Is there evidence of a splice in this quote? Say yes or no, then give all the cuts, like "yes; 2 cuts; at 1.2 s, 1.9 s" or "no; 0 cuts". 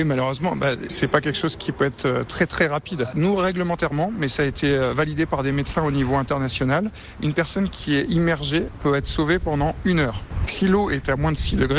no; 0 cuts